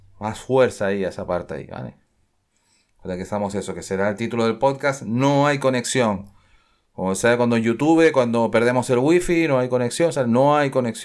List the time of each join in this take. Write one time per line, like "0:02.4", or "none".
none